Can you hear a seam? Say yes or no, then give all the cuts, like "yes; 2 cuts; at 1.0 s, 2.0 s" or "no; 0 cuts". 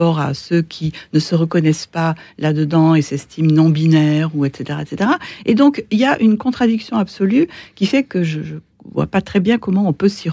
no; 0 cuts